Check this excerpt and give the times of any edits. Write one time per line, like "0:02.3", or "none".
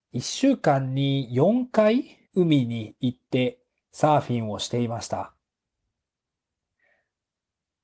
0:02.2